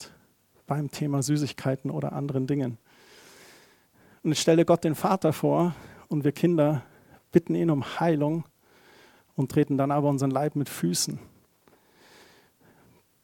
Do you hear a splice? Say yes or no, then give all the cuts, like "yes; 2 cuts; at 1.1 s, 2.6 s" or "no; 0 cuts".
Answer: no; 0 cuts